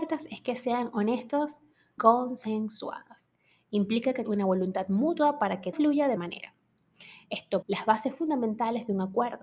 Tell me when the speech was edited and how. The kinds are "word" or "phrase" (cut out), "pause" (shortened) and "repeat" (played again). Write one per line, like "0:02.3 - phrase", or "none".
0:02.0 - word
0:04.2 - word
0:05.7 - word
0:06.2 - word
0:07.6 - word